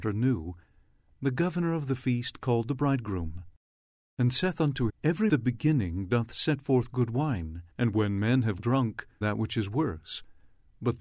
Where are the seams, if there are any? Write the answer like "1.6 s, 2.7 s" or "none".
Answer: 4.0 s, 4.9 s, 5.3 s, 7.7 s, 8.6 s, 9.2 s